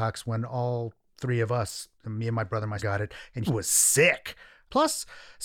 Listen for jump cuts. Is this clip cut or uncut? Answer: cut